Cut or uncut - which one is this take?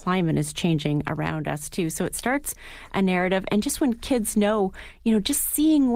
uncut